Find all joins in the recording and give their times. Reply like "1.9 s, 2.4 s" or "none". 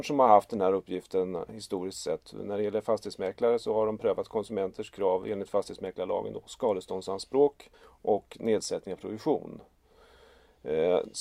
7.7 s